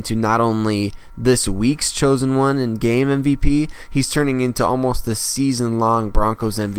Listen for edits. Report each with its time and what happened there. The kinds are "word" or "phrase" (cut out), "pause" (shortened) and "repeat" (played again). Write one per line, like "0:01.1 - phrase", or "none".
none